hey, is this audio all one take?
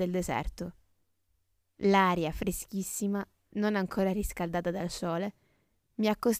yes; 0 cuts

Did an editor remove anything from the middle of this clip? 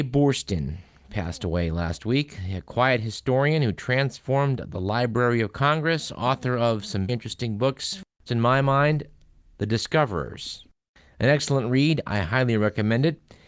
yes; 2 cuts; at 7.1 s, 8.3 s

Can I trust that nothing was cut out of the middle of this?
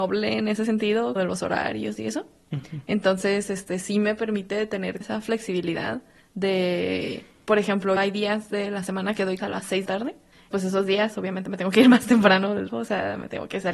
no; 7 cuts; at 1.2 s, 5.0 s, 8.0 s, 9.4 s, 9.9 s, 10.5 s, 12.7 s

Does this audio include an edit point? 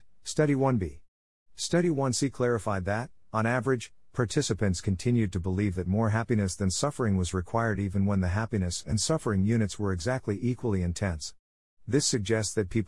no; 0 cuts

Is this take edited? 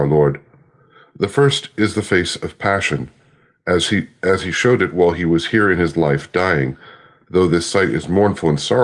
no; 0 cuts

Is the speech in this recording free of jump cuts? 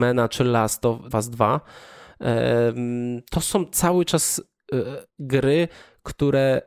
no; 2 cuts; at 1.1 s, 5.1 s

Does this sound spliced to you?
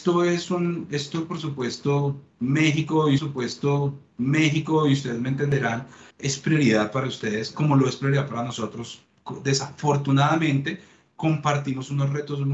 yes; 2 cuts; at 3.2 s, 6.1 s

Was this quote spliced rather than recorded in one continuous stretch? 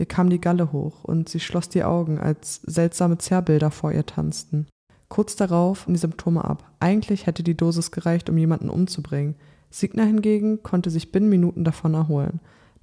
yes; 1 cut; at 5.9 s

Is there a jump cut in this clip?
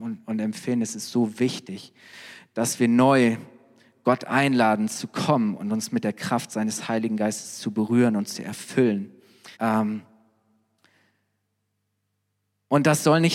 yes; 1 cut; at 9.5 s

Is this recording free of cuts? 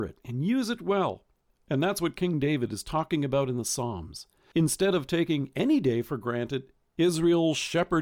yes; 0 cuts

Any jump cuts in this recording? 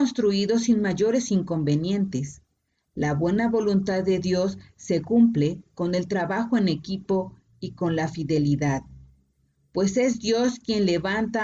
no; 0 cuts

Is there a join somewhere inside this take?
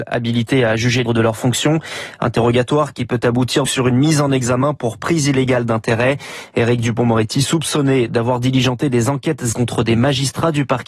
yes; 3 cuts; at 1.1 s, 3.7 s, 9.5 s

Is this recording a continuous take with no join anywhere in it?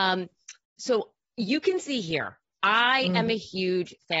yes; 0 cuts

